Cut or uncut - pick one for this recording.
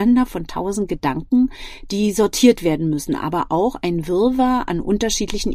uncut